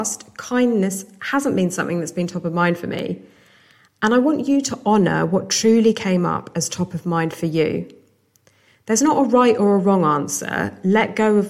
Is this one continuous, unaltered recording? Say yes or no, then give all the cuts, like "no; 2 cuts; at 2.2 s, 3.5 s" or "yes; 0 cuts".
yes; 0 cuts